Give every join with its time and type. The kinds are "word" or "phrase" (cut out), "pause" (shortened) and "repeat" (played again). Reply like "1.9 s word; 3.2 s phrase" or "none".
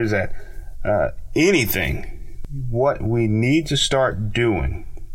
none